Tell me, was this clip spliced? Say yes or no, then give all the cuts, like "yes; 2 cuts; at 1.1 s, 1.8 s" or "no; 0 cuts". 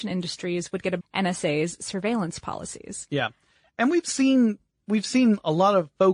yes; 1 cut; at 1.0 s